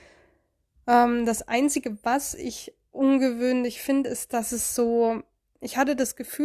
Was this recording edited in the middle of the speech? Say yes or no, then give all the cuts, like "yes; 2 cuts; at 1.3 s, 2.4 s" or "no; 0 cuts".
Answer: no; 0 cuts